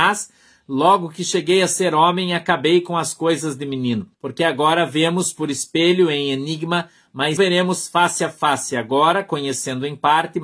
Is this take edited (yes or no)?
yes